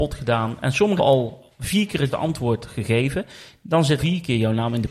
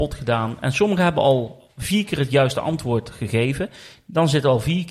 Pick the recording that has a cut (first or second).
first